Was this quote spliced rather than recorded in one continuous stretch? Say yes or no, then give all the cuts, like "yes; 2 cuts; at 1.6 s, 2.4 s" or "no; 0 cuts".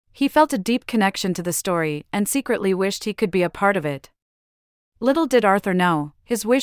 no; 0 cuts